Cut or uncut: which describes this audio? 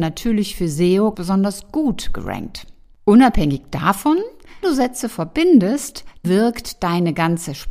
cut